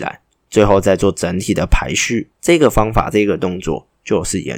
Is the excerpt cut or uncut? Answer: cut